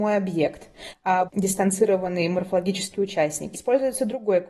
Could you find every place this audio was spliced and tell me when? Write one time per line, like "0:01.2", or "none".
0:01.3
0:03.5